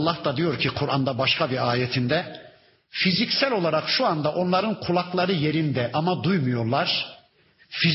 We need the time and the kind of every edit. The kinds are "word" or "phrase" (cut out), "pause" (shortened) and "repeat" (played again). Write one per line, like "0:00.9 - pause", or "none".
none